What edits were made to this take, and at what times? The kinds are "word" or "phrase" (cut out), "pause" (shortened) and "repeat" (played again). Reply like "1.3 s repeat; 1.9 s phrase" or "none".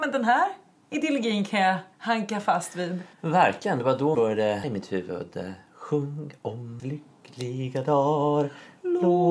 1.9 s pause; 3.1 s pause; 4.1 s word; 4.6 s word; 6.8 s word